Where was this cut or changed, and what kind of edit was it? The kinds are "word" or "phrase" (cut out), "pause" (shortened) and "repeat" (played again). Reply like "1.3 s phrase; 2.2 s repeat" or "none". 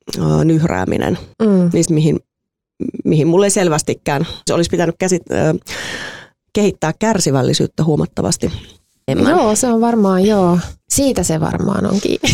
1.3 s pause; 1.8 s phrase; 4.5 s phrase; 9.1 s word; 10.8 s pause